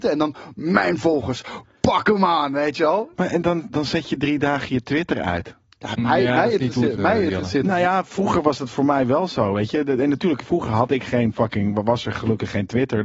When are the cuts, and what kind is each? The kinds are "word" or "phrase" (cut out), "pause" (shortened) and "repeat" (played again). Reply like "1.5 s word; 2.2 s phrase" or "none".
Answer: 3.4 s word; 7.0 s phrase